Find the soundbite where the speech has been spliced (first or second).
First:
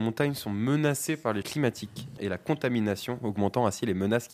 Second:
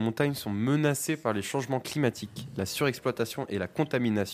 first